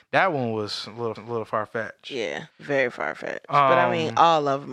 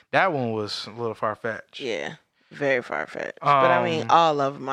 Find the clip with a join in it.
first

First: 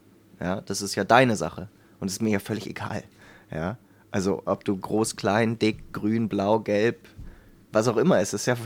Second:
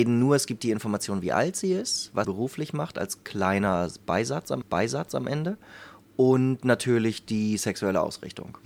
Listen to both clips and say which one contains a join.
second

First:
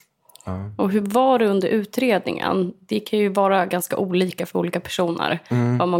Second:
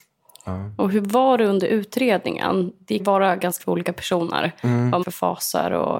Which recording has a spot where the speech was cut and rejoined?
second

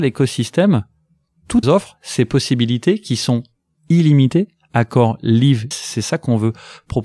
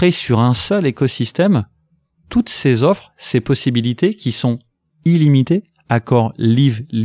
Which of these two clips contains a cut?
first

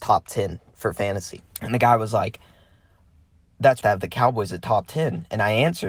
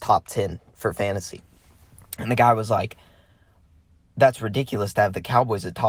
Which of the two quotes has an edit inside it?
first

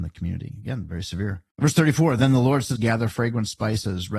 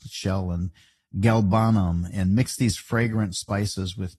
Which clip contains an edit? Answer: first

